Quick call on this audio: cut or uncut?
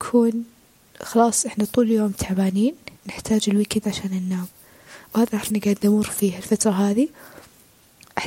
cut